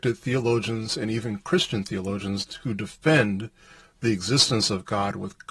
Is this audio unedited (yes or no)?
yes